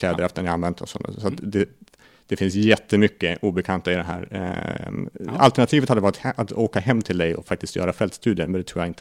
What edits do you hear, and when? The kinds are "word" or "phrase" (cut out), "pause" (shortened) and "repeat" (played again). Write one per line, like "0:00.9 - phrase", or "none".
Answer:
none